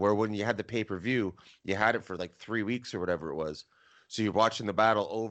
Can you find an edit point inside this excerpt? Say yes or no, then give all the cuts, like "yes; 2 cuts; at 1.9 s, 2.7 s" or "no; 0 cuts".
no; 0 cuts